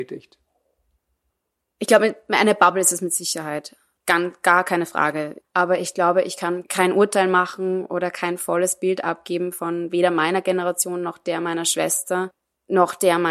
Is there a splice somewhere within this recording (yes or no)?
no